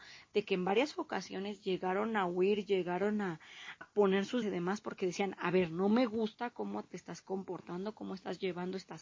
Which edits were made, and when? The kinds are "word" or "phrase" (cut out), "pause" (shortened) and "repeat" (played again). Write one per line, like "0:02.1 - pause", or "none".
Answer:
0:03.8 - word
0:04.4 - word